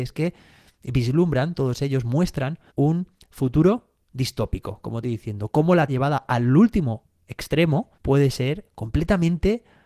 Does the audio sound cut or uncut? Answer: cut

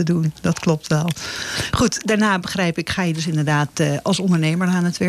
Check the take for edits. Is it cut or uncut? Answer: uncut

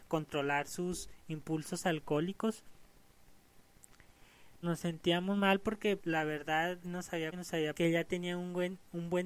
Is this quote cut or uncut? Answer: cut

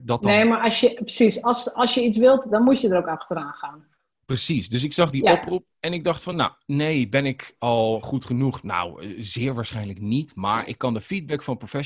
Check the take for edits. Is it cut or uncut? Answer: uncut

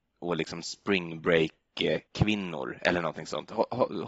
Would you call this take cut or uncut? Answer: cut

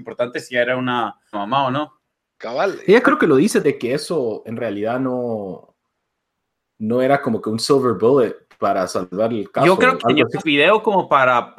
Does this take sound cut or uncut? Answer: cut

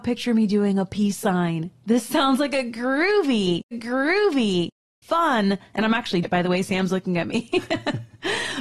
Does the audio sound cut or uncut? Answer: cut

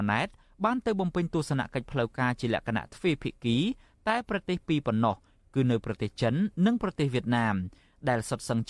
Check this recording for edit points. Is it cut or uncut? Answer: uncut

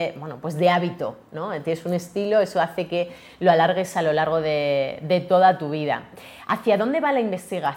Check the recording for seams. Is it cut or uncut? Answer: uncut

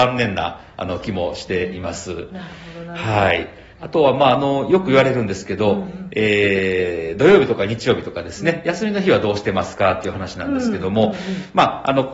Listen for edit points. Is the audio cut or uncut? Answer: cut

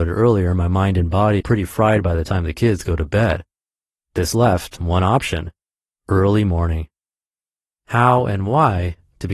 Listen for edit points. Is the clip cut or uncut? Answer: cut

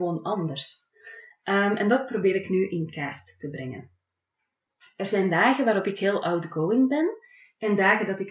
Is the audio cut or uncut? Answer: uncut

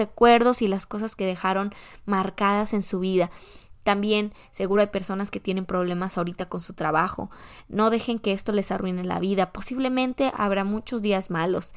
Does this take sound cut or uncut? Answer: uncut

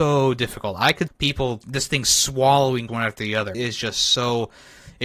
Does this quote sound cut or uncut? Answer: cut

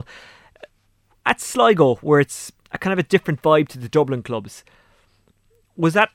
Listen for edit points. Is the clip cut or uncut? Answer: uncut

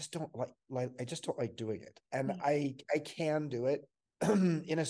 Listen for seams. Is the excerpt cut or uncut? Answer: cut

